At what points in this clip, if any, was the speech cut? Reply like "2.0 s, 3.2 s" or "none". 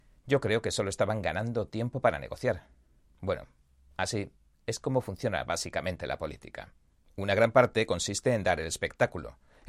none

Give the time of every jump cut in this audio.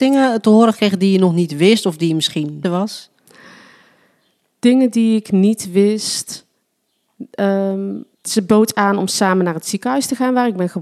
2.6 s, 8.1 s

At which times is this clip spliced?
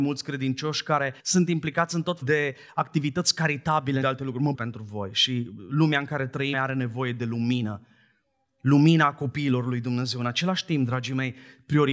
1.2 s, 2.2 s, 4.0 s, 4.5 s, 6.5 s

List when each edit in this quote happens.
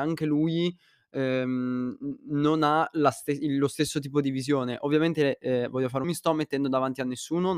6.0 s

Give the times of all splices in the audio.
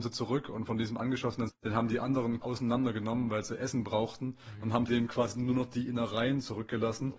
1.5 s, 2.4 s, 4.9 s

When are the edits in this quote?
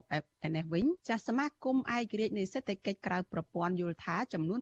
1.0 s

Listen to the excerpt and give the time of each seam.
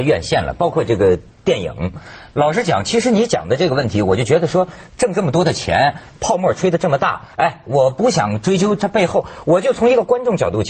7.3 s

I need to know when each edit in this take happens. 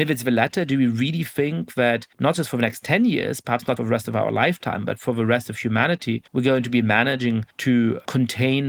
2.1 s, 3.8 s, 6.3 s, 7.5 s

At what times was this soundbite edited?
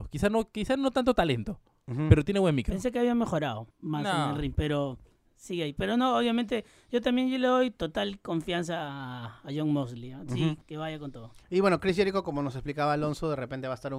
3.7 s, 10.6 s

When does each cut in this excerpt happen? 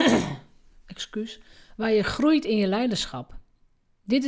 none

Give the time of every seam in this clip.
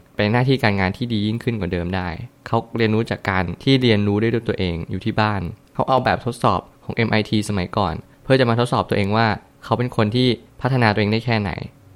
none

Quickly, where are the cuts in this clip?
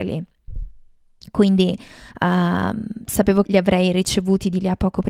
3.4 s

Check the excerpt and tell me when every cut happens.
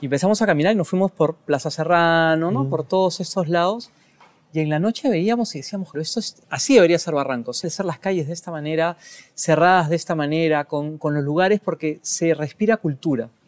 5.9 s, 6.4 s, 7.6 s, 11.0 s

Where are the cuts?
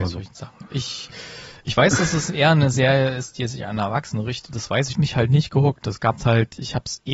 4.9 s

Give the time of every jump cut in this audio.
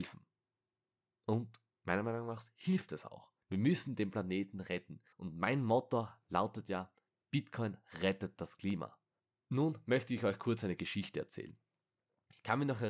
3.4 s, 5.1 s, 9.2 s

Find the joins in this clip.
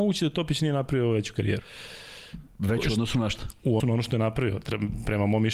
3.8 s

